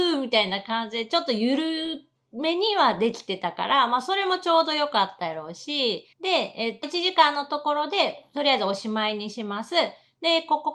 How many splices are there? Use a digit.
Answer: 2